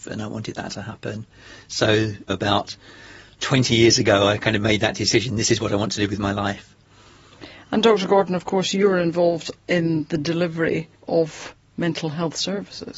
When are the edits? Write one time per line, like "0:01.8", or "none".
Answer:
0:09.6
0:11.0